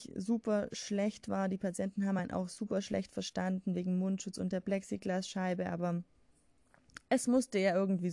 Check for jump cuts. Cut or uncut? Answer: uncut